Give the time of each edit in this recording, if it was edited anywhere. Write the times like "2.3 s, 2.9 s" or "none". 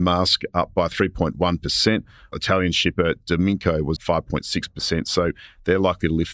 2.3 s, 4.0 s

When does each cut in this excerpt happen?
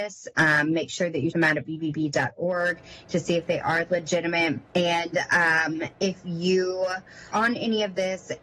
1.3 s, 4.7 s, 5.9 s, 7.3 s

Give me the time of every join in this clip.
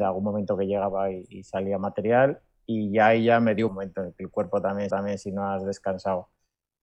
3.7 s, 4.9 s

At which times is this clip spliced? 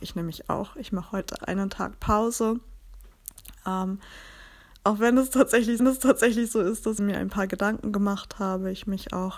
1.4 s, 5.8 s, 7.0 s

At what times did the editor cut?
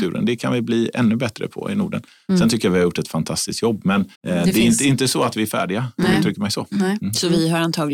4.1 s

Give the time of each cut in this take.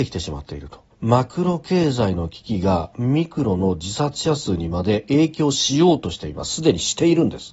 0.9 s

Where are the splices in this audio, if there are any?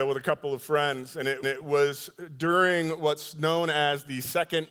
1.4 s

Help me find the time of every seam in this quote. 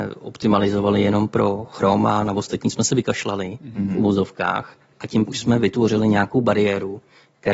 5.3 s

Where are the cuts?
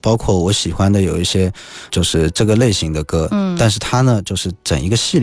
1.9 s

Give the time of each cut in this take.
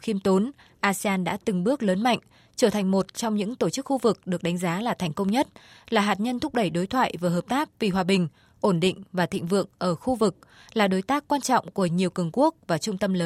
none

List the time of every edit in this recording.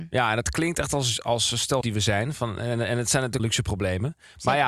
1.2 s, 1.8 s, 3.4 s

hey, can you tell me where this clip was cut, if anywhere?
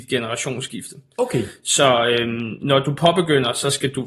none

